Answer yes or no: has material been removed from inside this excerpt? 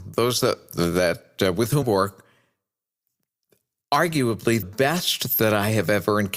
yes